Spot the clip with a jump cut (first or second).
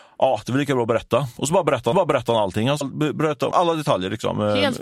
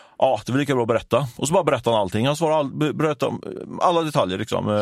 first